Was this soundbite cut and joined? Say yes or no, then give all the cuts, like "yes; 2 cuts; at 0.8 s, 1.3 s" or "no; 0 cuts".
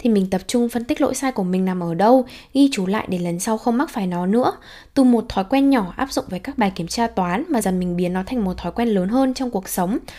yes; 1 cut; at 7.6 s